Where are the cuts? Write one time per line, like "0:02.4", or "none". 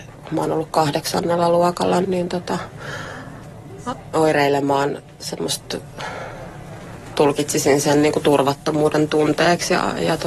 0:02.0
0:04.1